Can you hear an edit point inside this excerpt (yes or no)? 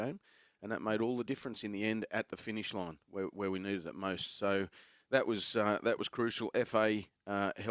no